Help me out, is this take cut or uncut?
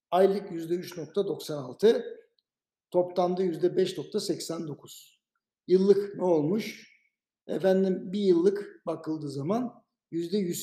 uncut